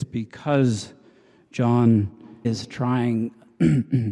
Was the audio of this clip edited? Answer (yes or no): yes